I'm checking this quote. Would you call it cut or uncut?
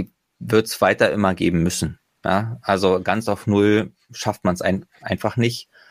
uncut